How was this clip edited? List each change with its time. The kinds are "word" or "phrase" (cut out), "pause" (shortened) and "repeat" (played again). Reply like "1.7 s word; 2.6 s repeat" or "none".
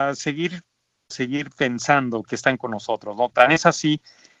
1.1 s word; 2.2 s word